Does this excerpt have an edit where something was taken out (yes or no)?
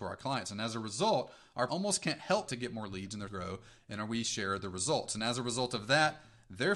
yes